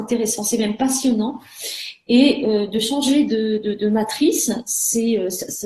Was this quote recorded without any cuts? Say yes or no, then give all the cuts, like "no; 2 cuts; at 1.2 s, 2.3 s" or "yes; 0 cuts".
yes; 0 cuts